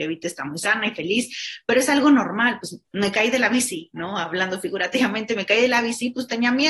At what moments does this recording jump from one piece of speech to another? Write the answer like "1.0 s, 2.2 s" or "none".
none